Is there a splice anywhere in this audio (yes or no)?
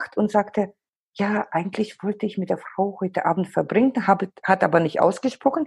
no